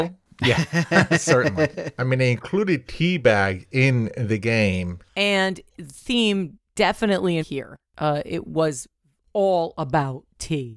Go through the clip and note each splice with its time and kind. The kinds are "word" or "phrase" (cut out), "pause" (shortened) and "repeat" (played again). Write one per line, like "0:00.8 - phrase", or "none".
0:07.4 - phrase